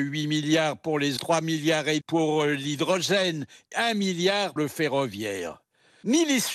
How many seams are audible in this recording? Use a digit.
4